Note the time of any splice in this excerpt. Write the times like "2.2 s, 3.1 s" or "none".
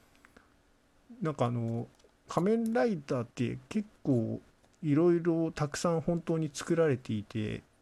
1.9 s, 3.3 s